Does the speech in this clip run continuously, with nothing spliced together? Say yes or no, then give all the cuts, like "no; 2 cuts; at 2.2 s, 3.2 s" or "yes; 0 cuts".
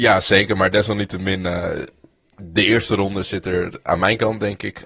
yes; 0 cuts